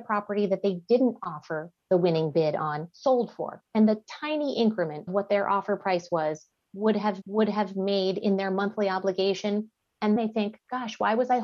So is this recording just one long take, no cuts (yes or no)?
no